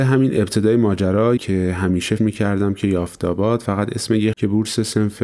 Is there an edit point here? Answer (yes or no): yes